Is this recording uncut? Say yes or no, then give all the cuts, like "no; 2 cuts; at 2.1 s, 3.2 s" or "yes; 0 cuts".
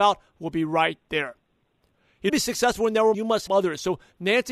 no; 3 cuts; at 2.3 s, 3.1 s, 3.5 s